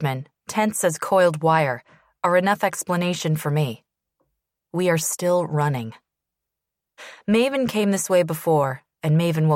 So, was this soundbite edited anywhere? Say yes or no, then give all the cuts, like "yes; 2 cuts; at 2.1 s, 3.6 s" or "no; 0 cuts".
no; 0 cuts